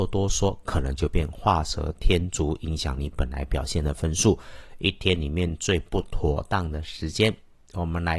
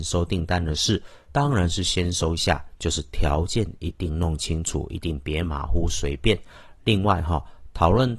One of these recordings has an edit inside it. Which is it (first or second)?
second